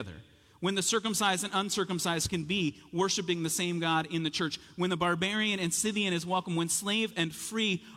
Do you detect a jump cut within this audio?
no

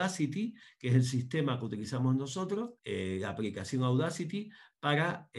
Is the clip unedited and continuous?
no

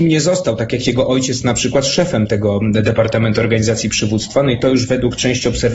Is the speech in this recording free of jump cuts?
yes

